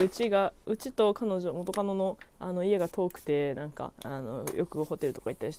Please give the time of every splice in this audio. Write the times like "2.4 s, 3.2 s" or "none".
3.9 s